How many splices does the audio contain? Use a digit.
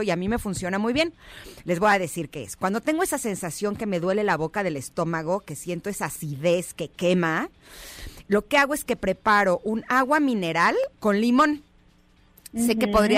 1